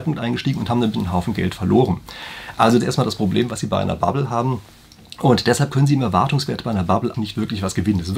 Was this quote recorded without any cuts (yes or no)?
no